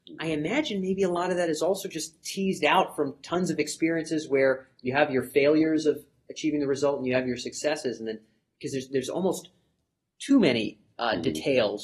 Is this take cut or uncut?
uncut